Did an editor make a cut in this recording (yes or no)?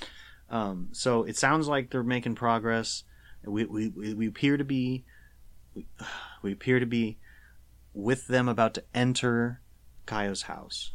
no